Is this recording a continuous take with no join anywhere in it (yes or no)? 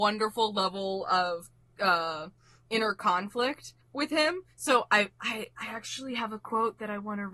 no